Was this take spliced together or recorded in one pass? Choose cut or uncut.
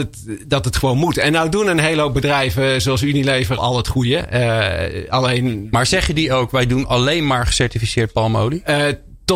cut